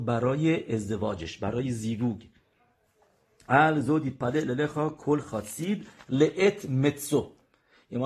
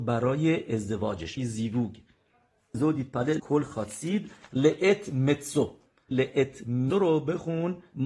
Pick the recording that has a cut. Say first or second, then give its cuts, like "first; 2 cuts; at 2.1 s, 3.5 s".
second; 5 cuts; at 1.4 s, 2.7 s, 3.4 s, 6.1 s, 6.9 s